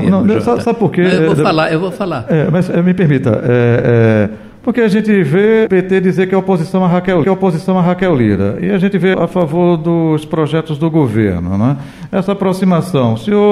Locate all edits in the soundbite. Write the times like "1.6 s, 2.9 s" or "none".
5.7 s, 7.2 s, 9.1 s